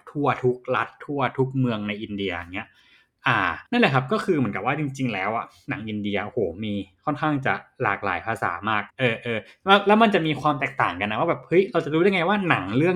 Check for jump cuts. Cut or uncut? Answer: cut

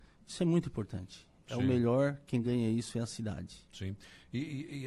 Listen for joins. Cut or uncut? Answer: uncut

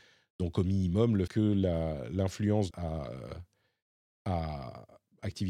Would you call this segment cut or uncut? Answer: cut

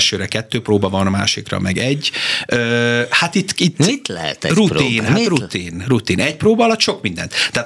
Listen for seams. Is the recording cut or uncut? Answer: uncut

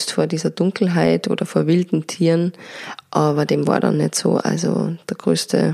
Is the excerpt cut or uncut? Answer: uncut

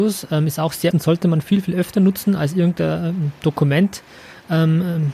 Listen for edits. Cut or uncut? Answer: cut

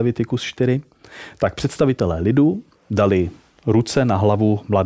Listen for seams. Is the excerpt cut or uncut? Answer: uncut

